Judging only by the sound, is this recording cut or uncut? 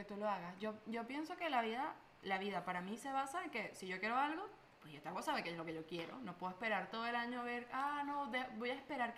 uncut